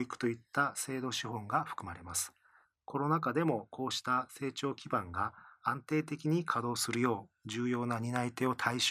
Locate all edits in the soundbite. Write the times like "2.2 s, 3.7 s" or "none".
none